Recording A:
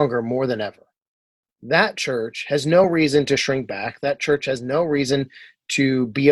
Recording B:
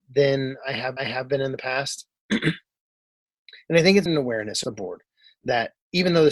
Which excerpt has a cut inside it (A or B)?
B